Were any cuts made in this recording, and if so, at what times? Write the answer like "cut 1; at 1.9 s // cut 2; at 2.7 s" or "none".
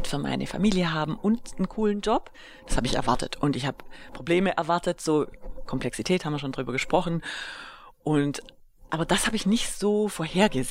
none